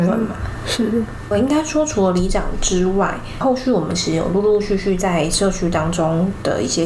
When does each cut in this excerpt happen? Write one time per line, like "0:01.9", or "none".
0:01.3